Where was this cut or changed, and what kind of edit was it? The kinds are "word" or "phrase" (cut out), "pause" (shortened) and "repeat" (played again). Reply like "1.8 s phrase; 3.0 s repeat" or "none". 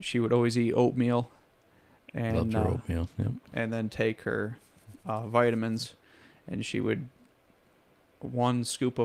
none